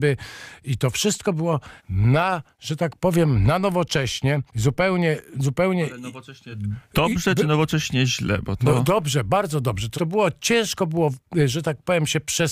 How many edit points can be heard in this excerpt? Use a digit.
3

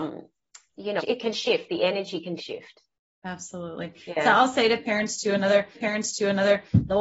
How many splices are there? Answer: 3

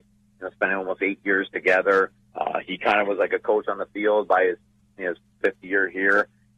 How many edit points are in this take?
1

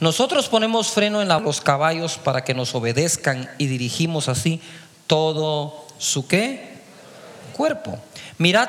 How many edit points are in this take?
1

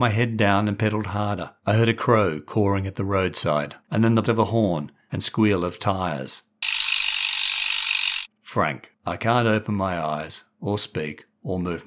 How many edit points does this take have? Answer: 4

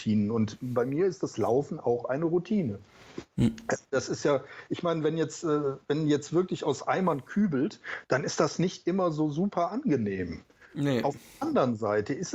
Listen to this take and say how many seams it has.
0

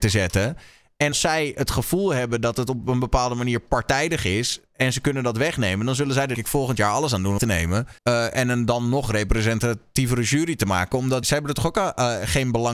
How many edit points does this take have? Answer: 5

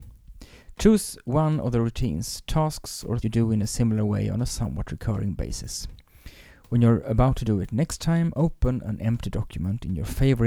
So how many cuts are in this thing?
1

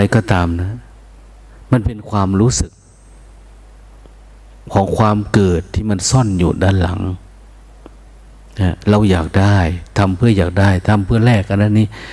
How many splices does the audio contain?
0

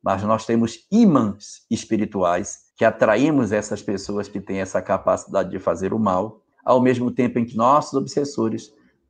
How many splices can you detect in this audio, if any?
3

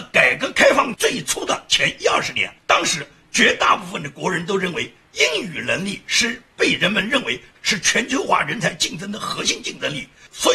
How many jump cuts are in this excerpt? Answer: 1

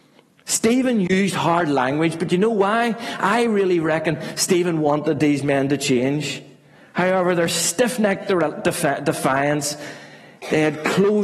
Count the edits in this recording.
0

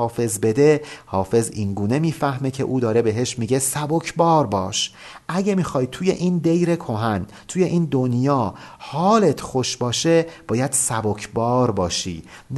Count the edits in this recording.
0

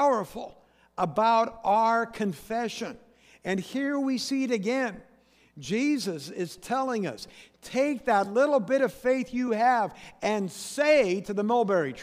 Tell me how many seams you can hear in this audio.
0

